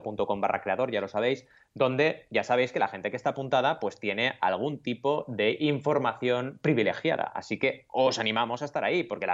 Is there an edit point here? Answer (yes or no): no